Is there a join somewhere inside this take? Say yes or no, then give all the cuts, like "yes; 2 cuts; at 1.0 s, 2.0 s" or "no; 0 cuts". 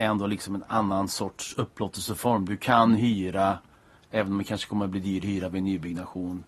no; 0 cuts